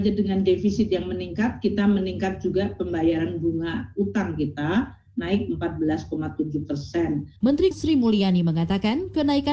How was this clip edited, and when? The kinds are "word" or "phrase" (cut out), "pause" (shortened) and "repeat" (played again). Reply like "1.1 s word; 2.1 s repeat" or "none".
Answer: 7.7 s word

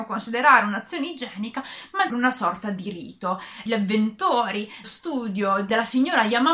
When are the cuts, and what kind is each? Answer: 2.1 s word; 4.8 s word

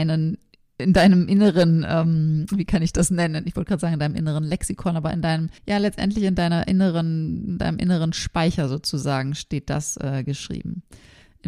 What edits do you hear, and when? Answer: 5.6 s pause

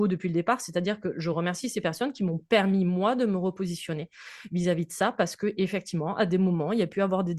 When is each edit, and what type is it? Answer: none

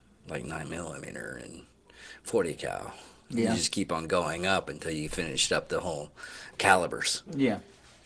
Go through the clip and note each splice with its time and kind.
none

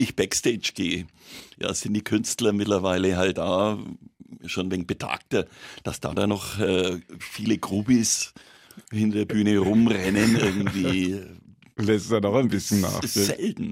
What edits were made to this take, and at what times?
none

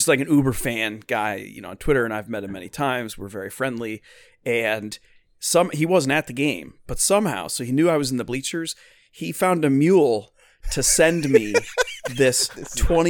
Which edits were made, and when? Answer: none

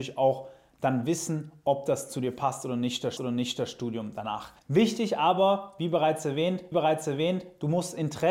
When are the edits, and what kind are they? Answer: 3.2 s repeat; 4.6 s pause; 6.7 s repeat

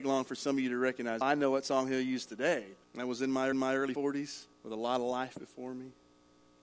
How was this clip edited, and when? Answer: 1.2 s word; 2.8 s pause; 3.5 s repeat; 4.5 s pause

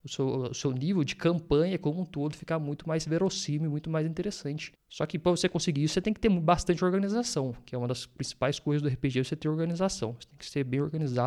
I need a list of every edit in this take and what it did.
none

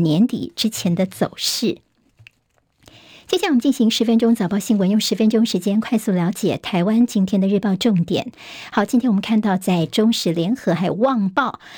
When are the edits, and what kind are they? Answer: none

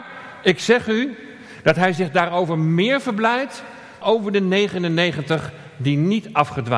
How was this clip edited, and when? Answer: 4.0 s word

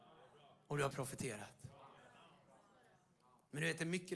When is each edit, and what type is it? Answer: 0.9 s word

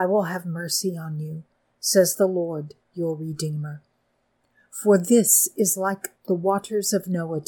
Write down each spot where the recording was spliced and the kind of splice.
none

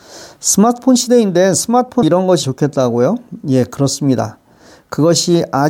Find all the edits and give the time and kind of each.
2.0 s word; 2.4 s word

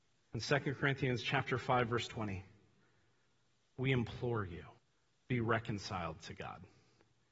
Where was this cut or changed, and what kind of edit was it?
4.8 s pause

